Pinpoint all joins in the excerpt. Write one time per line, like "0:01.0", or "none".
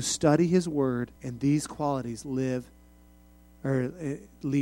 0:01.2